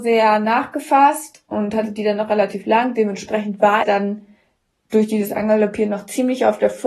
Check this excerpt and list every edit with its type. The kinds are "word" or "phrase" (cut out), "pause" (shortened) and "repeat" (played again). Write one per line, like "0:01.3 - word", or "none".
0:03.8 - word